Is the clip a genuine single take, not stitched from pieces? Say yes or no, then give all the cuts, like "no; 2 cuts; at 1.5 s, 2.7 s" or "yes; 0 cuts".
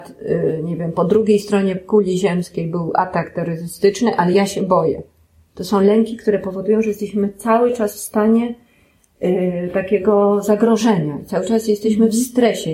yes; 0 cuts